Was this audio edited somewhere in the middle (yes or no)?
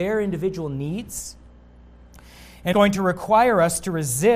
yes